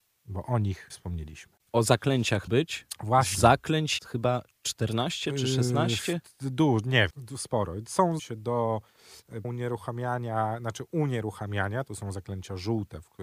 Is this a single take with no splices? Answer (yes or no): no